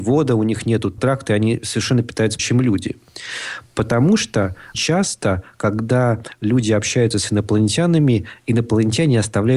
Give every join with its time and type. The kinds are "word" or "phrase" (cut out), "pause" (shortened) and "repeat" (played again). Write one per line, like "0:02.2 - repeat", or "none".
0:01.0 - word
0:02.4 - word
0:04.7 - word